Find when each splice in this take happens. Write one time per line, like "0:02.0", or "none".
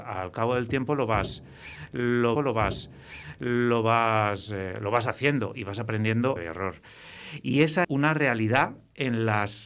0:02.3
0:06.4
0:07.8